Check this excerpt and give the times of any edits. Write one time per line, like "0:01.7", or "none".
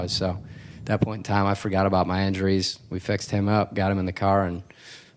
none